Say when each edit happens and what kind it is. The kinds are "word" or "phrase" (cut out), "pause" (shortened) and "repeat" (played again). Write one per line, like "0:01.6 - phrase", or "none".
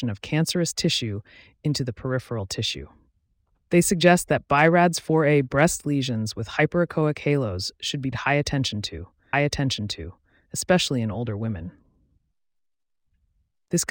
0:08.1 - word
0:09.3 - repeat